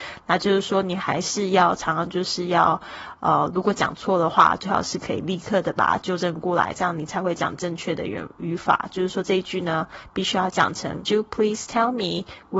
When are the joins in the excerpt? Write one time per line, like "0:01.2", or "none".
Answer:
0:11.1